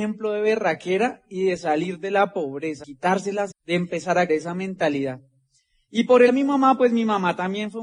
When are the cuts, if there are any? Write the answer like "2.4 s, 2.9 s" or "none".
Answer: 2.8 s, 3.5 s, 4.3 s, 6.3 s